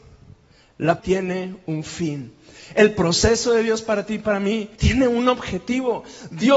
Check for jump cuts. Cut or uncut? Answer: cut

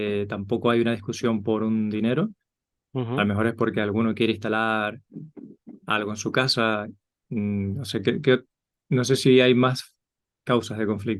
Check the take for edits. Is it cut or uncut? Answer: uncut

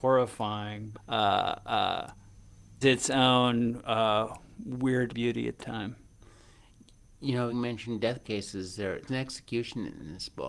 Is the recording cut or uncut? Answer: cut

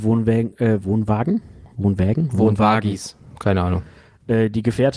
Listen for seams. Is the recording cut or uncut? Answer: uncut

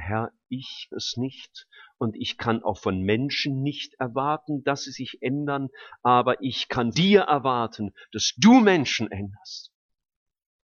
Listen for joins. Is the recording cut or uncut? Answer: cut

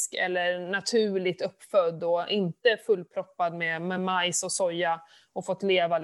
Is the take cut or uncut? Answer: uncut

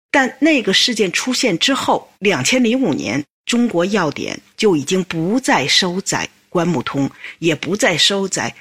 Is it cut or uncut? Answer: cut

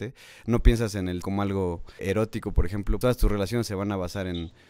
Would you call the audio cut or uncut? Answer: cut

